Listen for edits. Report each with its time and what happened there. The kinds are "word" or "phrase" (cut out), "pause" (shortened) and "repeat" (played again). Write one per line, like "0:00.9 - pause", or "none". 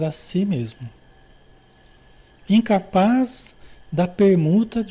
none